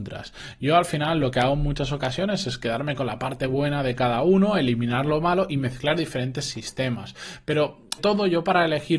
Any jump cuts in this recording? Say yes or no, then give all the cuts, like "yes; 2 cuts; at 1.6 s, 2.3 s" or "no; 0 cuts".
yes; 1 cut; at 8.0 s